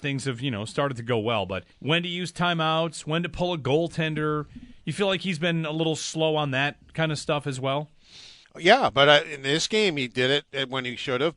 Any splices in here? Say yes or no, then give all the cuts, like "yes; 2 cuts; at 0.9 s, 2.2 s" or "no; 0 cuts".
yes; 2 cuts; at 1.7 s, 8.4 s